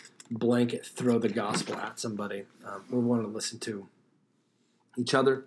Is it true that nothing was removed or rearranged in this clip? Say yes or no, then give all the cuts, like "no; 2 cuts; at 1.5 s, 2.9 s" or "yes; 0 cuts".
yes; 0 cuts